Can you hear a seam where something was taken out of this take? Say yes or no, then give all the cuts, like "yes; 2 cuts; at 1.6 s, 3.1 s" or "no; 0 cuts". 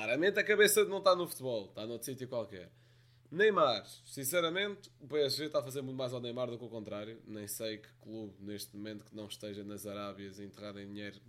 no; 0 cuts